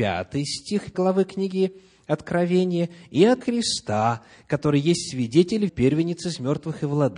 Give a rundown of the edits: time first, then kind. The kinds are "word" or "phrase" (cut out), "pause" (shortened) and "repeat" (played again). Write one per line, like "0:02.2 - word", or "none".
0:00.9 - word
0:03.4 - word
0:05.7 - word